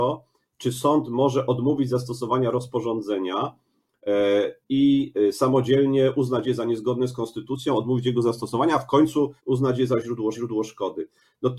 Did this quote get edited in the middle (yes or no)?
yes